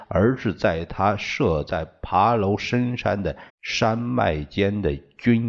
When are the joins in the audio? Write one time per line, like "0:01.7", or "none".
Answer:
0:03.5